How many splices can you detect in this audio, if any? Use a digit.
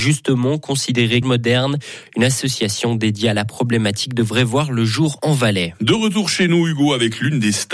1